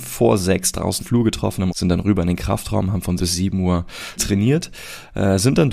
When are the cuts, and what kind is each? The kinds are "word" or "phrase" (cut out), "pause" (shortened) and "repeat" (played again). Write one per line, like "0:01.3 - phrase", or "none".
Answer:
0:01.0 - word
0:01.7 - word
0:03.2 - word
0:04.2 - word